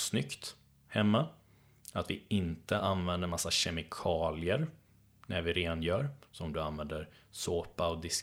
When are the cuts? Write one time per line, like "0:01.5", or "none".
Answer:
none